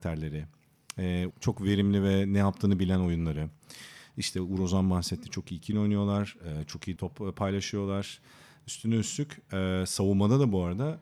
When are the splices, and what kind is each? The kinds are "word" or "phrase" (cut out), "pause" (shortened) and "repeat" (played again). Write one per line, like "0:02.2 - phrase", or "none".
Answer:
0:01.3 - word
0:05.7 - word
0:07.0 - word